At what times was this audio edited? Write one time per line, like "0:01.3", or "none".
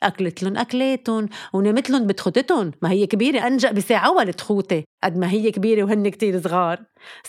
none